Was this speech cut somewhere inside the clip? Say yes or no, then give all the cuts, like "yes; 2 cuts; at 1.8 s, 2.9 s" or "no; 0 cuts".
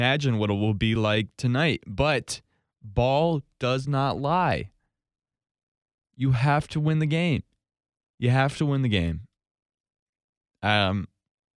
no; 0 cuts